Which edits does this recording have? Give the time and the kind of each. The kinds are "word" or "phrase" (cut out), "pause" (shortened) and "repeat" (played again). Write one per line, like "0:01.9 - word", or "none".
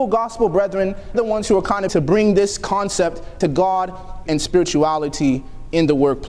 0:01.1 - word
0:01.9 - word
0:03.4 - word
0:04.3 - word

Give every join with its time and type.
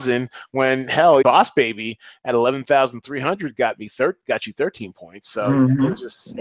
0:01.2 - word

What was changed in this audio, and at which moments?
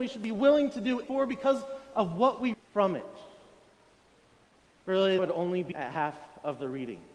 0:01.0 - word
0:02.5 - word
0:05.2 - word
0:05.7 - word

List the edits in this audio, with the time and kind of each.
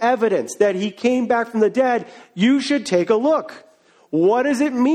none

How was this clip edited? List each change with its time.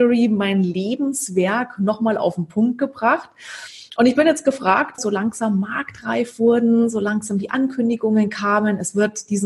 0:05.0 - phrase

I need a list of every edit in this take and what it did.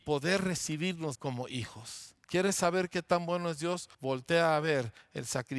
0:01.1 - phrase
0:02.2 - pause
0:03.9 - pause

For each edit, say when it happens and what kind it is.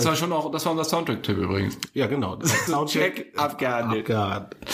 0:02.7 - word

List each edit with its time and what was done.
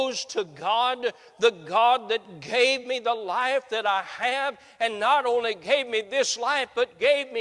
none

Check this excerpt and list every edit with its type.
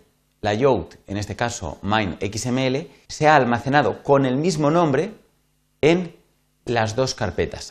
0:03.1 - pause

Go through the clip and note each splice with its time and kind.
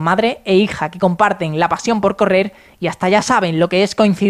none

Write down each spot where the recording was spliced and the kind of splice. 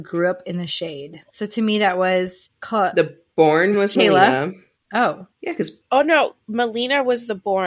0:03.7 - word

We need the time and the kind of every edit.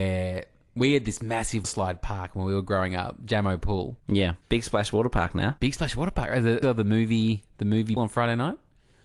0:01.6 - word
0:06.6 - word
0:08.0 - word

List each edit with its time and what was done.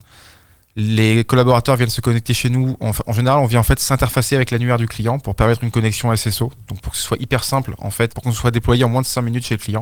0:08.1 - word

